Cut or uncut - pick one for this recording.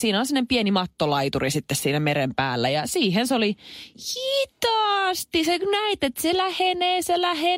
uncut